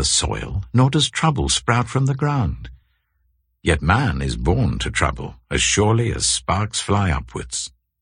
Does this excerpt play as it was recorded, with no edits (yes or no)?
yes